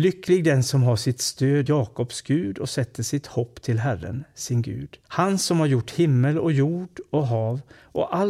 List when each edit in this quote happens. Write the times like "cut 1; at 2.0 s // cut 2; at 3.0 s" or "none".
cut 1; at 1.7 s // cut 2; at 5.0 s